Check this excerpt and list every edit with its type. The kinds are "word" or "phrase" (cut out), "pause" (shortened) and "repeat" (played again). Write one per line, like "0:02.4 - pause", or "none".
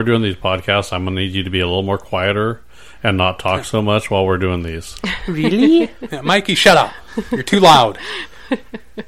none